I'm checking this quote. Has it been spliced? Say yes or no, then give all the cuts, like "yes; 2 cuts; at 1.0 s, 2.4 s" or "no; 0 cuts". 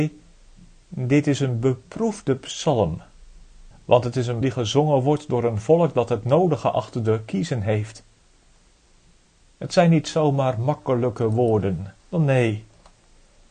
yes; 3 cuts; at 3.7 s, 4.4 s, 12.0 s